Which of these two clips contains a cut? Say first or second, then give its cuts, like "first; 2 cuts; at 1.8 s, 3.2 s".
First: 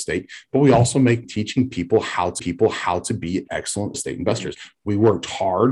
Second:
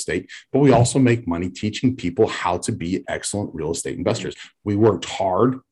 first; 3 cuts; at 1.2 s, 2.4 s, 3.9 s